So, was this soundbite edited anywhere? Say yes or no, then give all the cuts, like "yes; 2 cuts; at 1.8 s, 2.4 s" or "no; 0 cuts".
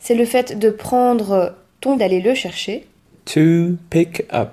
yes; 1 cut; at 2.0 s